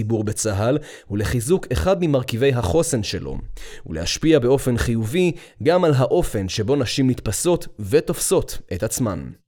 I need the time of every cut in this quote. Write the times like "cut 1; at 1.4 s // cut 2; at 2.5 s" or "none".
none